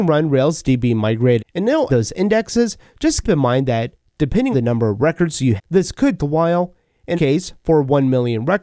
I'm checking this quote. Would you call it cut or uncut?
cut